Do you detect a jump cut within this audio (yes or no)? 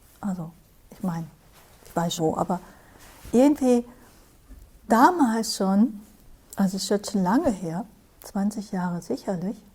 yes